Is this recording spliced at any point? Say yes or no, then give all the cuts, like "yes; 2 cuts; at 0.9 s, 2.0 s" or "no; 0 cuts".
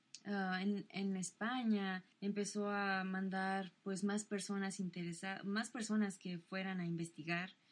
yes; 1 cut; at 2.1 s